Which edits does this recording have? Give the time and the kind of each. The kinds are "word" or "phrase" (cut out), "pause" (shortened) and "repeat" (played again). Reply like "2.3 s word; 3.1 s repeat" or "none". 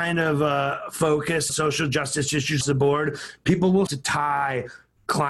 1.5 s word; 2.6 s word; 3.9 s word